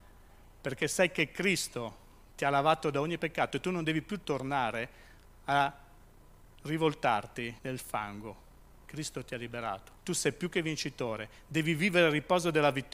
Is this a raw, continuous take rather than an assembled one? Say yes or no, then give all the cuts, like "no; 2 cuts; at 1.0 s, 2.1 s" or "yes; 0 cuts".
no; 2 cuts; at 7.6 s, 10.0 s